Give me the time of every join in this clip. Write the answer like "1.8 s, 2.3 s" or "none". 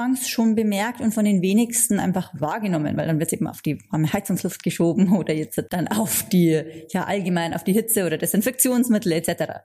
5.7 s